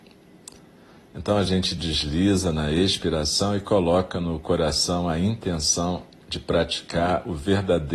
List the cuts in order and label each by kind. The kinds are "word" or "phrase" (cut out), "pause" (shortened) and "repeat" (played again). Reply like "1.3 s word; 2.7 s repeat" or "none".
none